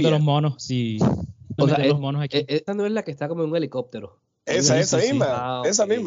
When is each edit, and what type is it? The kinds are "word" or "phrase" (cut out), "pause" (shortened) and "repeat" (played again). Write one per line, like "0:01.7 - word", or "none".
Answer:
0:01.6 - word
0:02.7 - word